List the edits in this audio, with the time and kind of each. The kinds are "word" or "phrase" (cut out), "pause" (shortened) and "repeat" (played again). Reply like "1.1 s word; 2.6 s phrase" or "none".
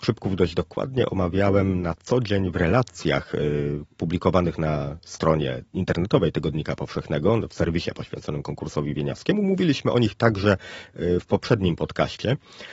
5.7 s pause

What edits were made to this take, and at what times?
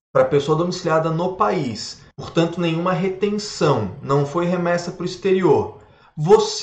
2.1 s pause

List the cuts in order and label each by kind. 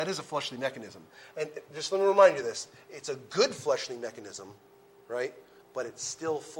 none

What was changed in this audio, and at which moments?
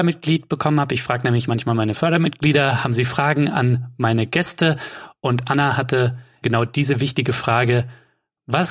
6.4 s word

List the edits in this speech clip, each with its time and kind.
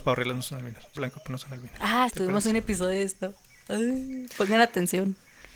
1.0 s word; 2.1 s word

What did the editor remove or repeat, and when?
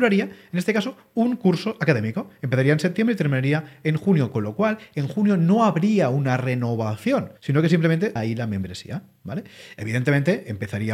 7.4 s pause; 8.2 s phrase

